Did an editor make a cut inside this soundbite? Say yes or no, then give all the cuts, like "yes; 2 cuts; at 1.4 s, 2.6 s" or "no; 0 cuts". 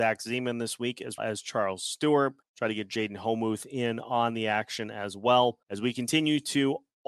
yes; 3 cuts; at 1.2 s, 2.4 s, 5.6 s